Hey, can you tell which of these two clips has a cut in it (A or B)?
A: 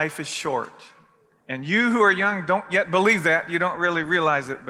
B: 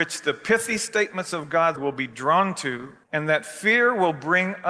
B